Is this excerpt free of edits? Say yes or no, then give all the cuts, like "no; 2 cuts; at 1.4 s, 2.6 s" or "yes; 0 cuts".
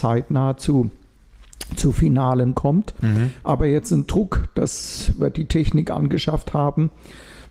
no; 1 cut; at 2.5 s